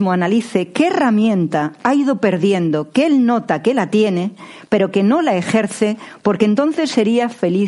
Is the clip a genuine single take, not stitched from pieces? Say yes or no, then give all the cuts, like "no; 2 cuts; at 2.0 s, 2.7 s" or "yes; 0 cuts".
yes; 0 cuts